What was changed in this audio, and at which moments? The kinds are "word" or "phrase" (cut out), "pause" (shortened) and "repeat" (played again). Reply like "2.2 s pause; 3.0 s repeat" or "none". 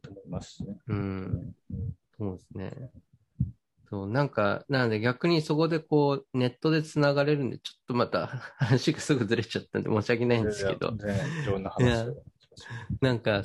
2.0 s pause; 3.8 s pause